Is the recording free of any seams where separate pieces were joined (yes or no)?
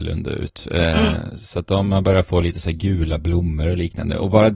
yes